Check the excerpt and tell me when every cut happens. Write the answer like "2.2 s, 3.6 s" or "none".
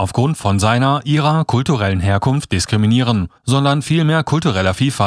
3.4 s